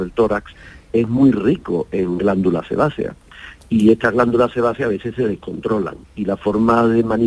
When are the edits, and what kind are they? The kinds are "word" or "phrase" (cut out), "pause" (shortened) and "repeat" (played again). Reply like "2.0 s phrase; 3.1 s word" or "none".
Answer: 6.0 s pause